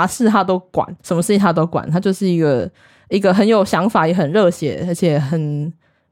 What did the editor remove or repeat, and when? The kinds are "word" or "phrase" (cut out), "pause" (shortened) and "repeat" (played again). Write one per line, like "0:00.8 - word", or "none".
0:01.0 - pause